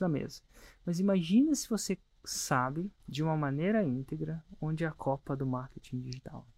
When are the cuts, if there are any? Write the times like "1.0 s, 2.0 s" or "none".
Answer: 3.0 s